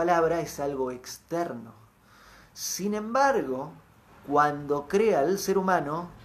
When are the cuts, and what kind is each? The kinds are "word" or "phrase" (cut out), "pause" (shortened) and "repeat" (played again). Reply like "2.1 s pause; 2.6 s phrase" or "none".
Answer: 4.1 s pause